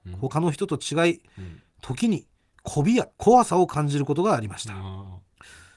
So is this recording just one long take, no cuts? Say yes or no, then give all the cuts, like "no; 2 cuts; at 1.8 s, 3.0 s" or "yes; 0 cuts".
no; 1 cut; at 3.1 s